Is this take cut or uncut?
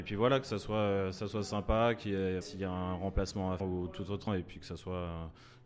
cut